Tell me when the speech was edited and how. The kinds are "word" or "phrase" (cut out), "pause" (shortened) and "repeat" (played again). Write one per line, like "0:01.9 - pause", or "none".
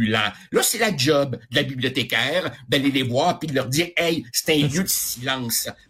none